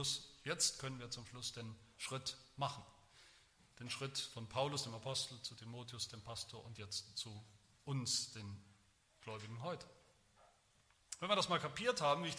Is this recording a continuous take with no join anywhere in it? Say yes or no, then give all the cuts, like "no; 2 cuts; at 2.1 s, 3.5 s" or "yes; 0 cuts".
yes; 0 cuts